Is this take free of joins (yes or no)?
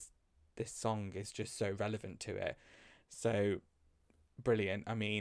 yes